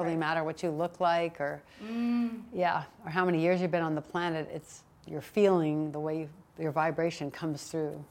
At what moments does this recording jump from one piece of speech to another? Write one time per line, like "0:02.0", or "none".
none